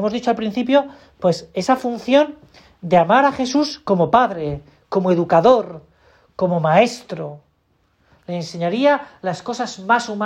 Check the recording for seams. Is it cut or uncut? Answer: uncut